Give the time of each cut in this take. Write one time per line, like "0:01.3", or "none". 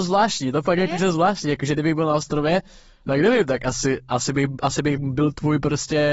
none